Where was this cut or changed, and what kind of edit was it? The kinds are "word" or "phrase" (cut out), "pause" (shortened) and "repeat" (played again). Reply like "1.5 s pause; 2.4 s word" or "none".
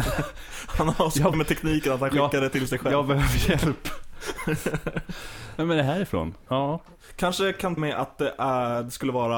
1.3 s word; 7.8 s word